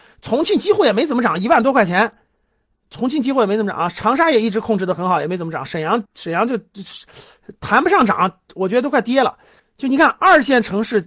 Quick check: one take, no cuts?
no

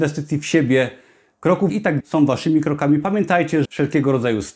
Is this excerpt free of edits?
no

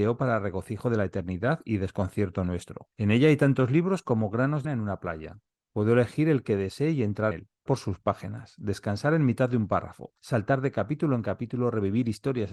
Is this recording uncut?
no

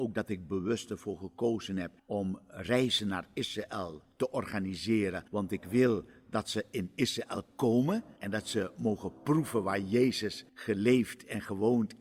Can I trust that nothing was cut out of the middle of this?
no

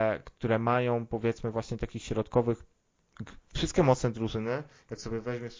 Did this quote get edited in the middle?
no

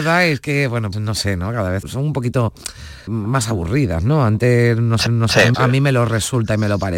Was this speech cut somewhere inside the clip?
yes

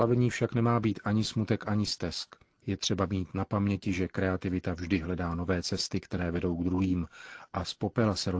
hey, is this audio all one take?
yes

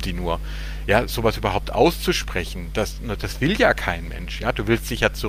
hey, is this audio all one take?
yes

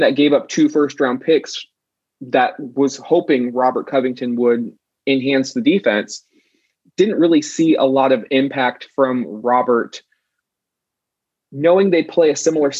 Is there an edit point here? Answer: no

